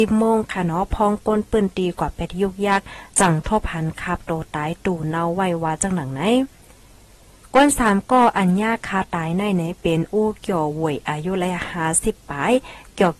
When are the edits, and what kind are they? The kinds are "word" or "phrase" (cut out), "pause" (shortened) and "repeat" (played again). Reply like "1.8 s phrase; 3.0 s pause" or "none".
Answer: none